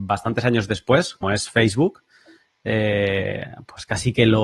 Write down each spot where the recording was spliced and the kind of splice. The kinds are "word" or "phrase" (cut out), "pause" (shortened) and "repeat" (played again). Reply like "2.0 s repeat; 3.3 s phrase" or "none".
1.2 s word